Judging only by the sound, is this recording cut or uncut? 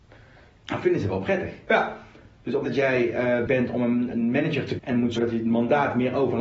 cut